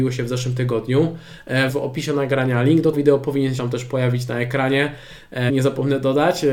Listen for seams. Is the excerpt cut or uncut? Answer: cut